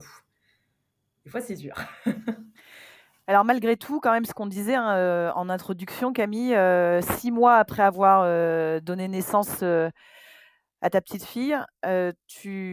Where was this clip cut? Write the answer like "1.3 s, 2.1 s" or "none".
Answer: none